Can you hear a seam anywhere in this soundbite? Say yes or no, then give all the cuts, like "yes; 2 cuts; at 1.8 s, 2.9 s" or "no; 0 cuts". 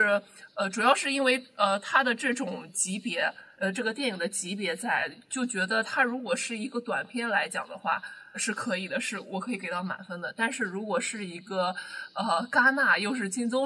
yes; 1 cut; at 8.3 s